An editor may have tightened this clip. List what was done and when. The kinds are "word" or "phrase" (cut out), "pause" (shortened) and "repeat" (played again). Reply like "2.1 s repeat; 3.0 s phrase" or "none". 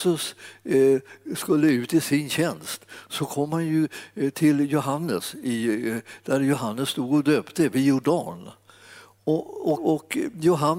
9.7 s word